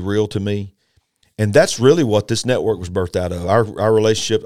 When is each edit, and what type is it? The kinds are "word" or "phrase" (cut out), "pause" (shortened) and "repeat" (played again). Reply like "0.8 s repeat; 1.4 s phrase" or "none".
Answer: none